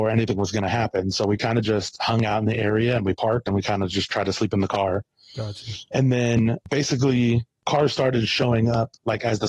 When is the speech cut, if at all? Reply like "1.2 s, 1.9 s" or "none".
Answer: none